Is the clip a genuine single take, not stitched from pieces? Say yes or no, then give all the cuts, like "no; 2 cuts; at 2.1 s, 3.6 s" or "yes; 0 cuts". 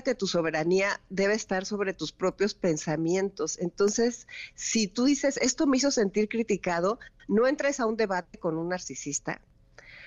yes; 0 cuts